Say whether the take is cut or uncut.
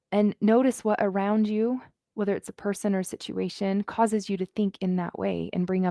uncut